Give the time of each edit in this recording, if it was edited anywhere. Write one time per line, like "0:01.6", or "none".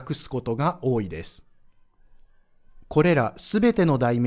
0:02.8

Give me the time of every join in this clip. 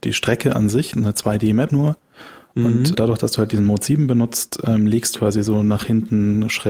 0:00.9
0:01.7
0:02.9
0:05.2

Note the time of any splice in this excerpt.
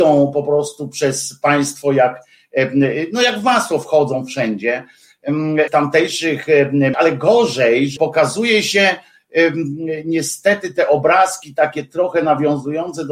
0:05.7
0:06.9
0:08.0

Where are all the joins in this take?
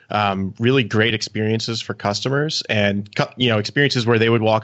none

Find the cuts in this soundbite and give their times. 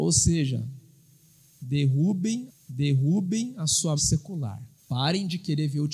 0:02.5
0:04.0
0:04.8

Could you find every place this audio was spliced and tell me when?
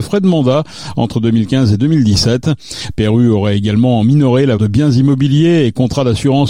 0:04.6

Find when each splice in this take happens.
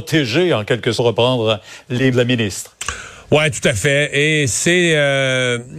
0:01.0
0:02.1

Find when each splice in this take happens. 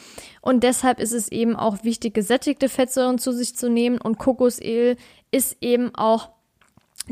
none

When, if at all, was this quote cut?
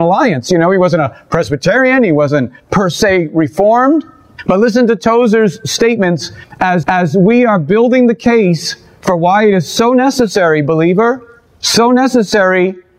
0:06.8

